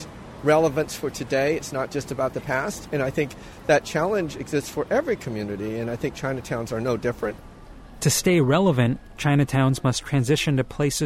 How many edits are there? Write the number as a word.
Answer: zero